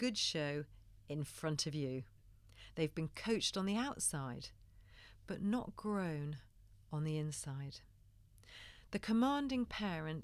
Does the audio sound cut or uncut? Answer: uncut